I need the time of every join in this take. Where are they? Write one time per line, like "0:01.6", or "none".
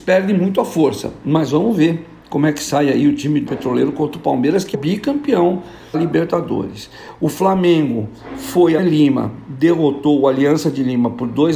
0:03.5
0:04.7
0:05.9
0:08.8